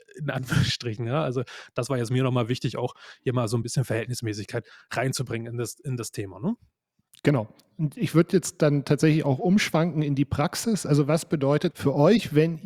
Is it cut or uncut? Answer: cut